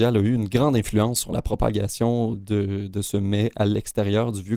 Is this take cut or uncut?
uncut